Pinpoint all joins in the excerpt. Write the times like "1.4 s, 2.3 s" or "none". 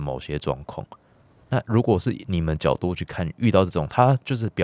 none